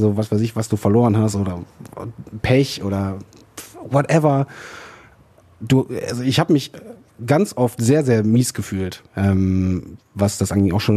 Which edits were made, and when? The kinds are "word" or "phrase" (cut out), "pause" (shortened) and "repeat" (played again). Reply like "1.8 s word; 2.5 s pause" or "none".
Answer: none